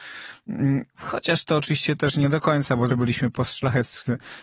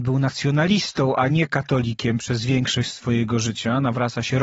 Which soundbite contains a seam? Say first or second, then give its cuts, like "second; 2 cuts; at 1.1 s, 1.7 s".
first; 1 cut; at 2.9 s